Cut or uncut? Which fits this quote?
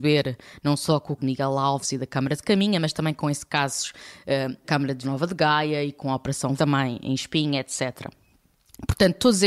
cut